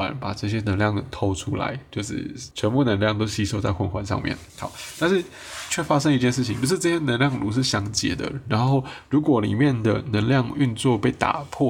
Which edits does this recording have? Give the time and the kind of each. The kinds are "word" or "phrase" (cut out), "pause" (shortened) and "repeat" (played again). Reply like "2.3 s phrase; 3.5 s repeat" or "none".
2.5 s pause; 4.5 s pause